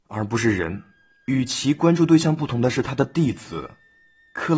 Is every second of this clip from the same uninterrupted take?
yes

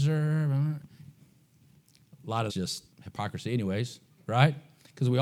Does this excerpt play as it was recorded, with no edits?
no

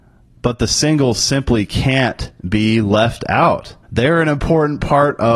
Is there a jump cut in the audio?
yes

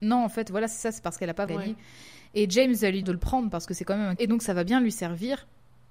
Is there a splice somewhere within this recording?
yes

